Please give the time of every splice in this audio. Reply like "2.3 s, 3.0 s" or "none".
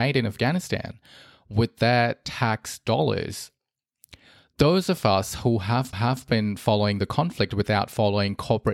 5.9 s